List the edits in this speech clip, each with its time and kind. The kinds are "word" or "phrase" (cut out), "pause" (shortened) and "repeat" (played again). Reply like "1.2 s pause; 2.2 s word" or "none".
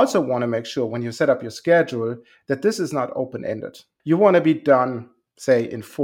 4.0 s word